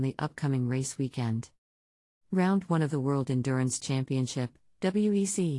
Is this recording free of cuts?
yes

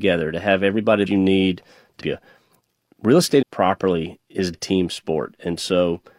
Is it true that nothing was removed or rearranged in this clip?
no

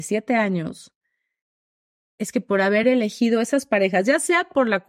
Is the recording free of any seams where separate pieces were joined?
yes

